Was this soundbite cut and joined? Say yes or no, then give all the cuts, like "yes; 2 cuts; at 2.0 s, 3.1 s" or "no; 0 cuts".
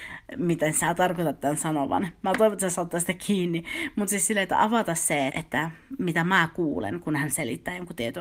yes; 1 cut; at 5.3 s